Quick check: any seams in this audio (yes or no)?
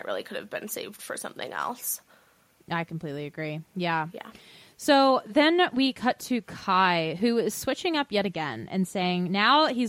no